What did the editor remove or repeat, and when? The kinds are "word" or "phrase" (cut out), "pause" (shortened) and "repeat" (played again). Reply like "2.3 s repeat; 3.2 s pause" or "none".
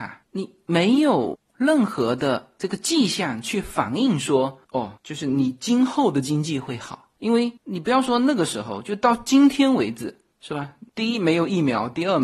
4.6 s pause; 7.6 s pause; 10.9 s pause